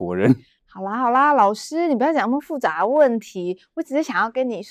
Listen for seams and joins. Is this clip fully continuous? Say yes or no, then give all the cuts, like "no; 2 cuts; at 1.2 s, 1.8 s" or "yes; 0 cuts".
yes; 0 cuts